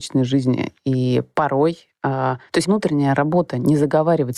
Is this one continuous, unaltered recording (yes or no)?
no